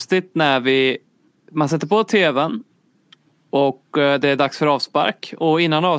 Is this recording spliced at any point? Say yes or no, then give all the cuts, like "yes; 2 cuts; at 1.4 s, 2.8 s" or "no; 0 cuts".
no; 0 cuts